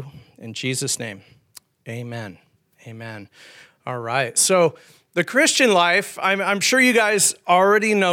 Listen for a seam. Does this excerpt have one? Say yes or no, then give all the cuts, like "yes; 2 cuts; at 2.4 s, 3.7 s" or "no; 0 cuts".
no; 0 cuts